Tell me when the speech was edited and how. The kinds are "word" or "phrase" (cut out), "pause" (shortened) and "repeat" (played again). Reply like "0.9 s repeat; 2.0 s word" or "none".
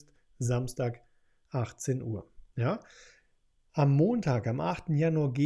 none

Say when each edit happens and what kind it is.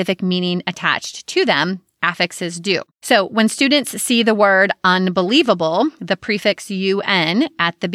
2.9 s pause

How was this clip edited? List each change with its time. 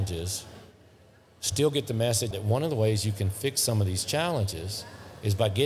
2.3 s word

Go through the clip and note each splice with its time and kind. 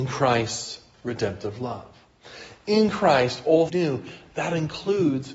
3.7 s phrase

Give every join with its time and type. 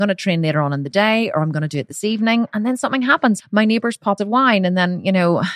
3.4 s word; 4.2 s phrase

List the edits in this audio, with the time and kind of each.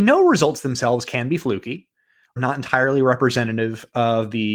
2.4 s word

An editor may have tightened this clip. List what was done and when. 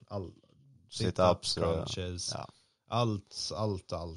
none

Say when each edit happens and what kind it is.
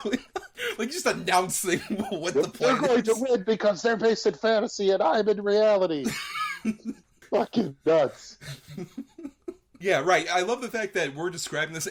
none

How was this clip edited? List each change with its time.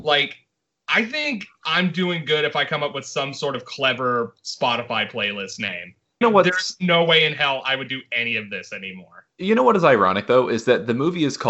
6.2 s word

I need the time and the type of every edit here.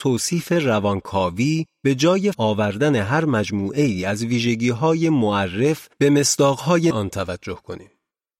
2.3 s word; 5.9 s pause; 6.9 s word

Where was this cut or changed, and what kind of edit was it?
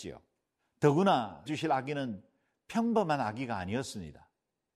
1.5 s phrase

